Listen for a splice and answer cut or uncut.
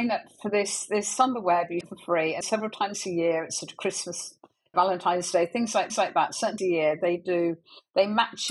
cut